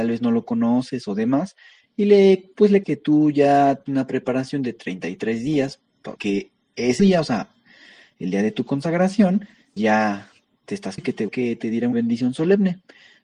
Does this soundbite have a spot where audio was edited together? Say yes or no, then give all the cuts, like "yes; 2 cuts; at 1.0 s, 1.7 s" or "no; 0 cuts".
yes; 8 cuts; at 2.8 s, 3.9 s, 6.2 s, 7.0 s, 9.8 s, 11.0 s, 11.3 s, 11.9 s